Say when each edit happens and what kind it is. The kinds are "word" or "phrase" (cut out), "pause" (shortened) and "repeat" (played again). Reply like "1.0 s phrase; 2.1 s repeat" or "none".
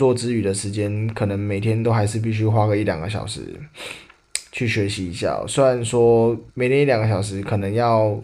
6.5 s pause